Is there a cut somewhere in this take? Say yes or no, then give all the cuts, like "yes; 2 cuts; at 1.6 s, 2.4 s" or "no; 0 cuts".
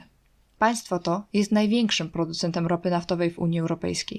no; 0 cuts